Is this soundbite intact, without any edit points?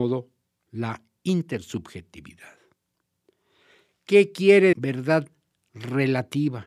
no; 1 cut; at 4.7 s

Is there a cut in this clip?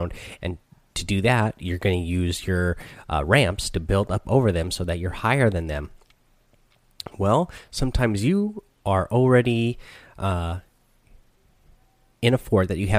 no; 0 cuts

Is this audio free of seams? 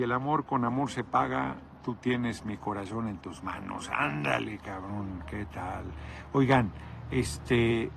yes; 0 cuts

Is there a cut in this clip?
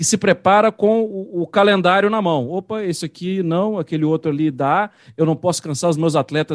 no; 0 cuts

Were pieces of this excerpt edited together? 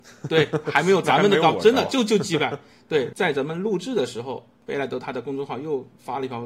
no; 0 cuts

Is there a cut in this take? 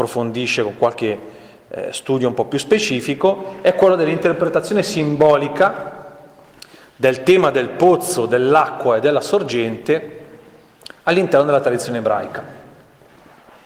no; 0 cuts

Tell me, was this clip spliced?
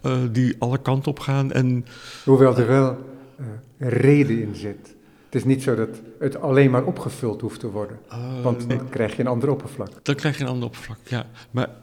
yes; 2 cuts; at 8.7 s, 10.0 s

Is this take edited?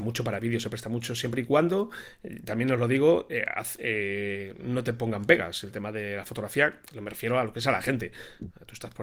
no; 0 cuts

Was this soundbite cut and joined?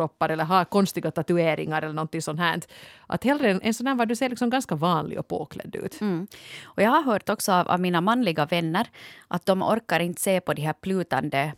no; 0 cuts

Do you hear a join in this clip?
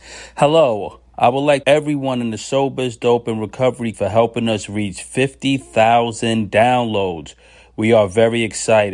yes; 2 cuts; at 1.6 s, 3.9 s

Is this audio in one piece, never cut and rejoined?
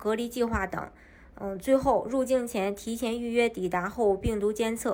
yes; 0 cuts

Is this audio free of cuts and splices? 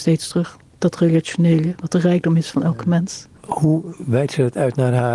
no; 1 cut; at 3.4 s

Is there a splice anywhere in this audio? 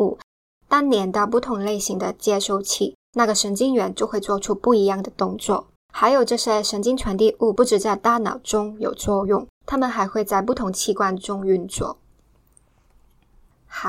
yes; 3 cuts; at 3.0 s, 5.8 s, 9.6 s

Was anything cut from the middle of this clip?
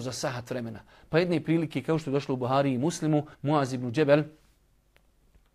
yes; 1 cut; at 3.3 s

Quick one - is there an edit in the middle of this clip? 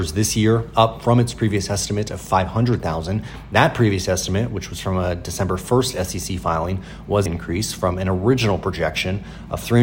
yes; 1 cut; at 7.3 s

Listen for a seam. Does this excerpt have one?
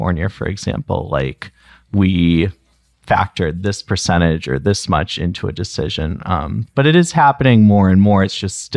no; 0 cuts

